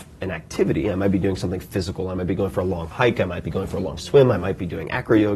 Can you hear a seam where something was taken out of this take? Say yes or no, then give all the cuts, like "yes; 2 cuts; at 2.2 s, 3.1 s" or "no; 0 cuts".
no; 0 cuts